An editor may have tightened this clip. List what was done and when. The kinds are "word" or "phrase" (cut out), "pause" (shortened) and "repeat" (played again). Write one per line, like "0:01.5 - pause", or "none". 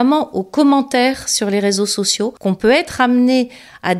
0:02.4 - pause

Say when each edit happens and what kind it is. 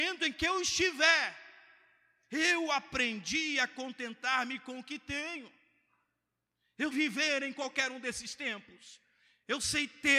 0:06.9 - word

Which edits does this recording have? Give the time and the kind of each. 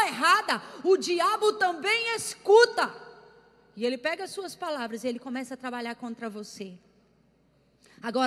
none

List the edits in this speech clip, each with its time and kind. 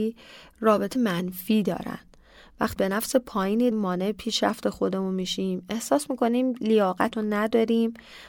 0:00.9 - word
0:02.8 - word
0:03.7 - word
0:07.1 - word

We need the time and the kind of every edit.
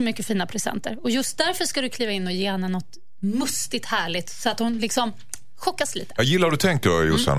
none

